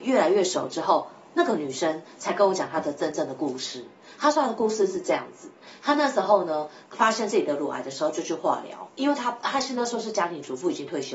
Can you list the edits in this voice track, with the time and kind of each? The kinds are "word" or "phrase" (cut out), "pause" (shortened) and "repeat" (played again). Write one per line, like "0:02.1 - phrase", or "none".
0:06.9 - pause